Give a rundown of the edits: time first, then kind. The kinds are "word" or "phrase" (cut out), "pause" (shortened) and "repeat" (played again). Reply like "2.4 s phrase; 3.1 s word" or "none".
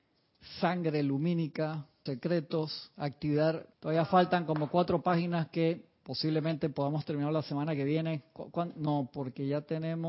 2.1 s word; 3.7 s pause